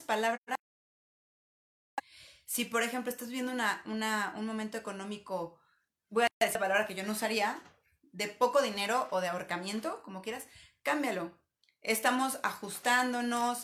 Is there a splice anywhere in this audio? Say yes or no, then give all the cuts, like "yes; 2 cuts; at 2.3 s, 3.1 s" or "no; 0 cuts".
no; 0 cuts